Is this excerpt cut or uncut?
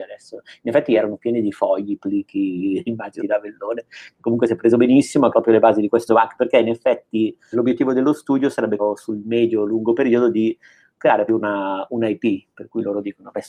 cut